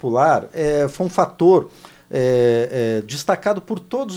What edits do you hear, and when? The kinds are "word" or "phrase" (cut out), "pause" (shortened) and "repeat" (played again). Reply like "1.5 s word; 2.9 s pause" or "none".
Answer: none